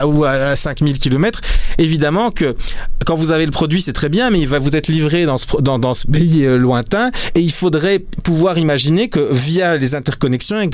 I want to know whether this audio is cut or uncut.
uncut